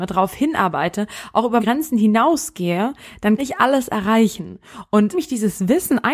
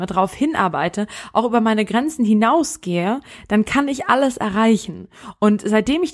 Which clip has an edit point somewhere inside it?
first; 3 cuts; at 1.6 s, 3.4 s, 5.1 s

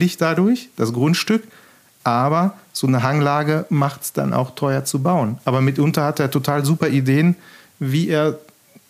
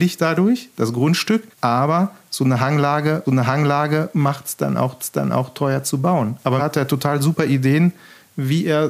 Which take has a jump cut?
second; 4 cuts; at 1.5 s, 3.3 s, 5.0 s, 6.6 s

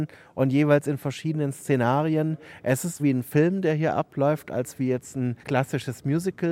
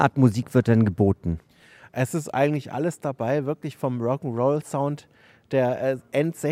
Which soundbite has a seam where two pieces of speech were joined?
first; 2 cuts; at 3.0 s, 5.4 s

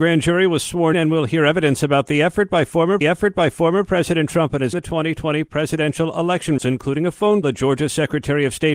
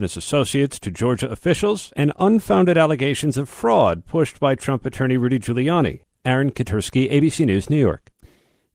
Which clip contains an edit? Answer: first; 5 cuts; at 0.9 s, 3.0 s, 4.7 s, 6.6 s, 7.4 s

